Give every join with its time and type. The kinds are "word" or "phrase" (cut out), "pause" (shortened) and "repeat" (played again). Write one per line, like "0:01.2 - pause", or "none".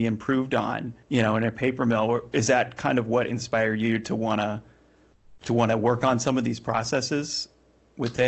0:01.0 - pause